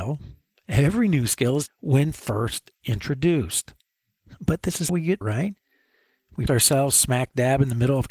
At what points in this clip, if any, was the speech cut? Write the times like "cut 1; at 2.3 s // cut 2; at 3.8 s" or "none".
cut 1; at 1.7 s // cut 2; at 4.9 s // cut 3; at 5.2 s // cut 4; at 6.5 s